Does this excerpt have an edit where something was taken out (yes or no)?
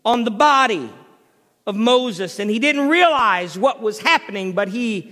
no